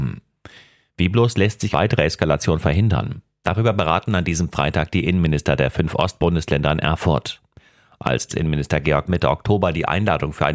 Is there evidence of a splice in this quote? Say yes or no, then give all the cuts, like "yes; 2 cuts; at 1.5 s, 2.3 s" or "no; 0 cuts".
yes; 3 cuts; at 1.7 s, 8.3 s, 9.1 s